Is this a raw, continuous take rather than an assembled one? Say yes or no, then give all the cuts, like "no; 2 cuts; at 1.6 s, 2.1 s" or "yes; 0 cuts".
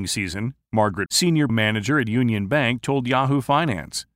no; 2 cuts; at 1.1 s, 1.5 s